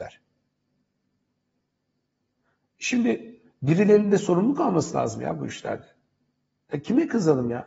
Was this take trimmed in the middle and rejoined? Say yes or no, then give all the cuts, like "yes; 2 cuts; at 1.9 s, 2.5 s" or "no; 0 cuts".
no; 0 cuts